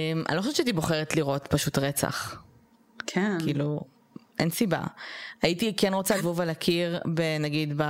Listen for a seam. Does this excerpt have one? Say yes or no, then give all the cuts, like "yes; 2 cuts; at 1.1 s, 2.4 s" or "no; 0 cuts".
yes; 1 cut; at 6.2 s